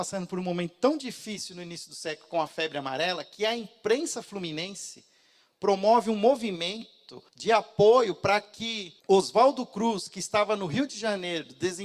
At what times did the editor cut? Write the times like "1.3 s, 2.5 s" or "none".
7.3 s, 9.0 s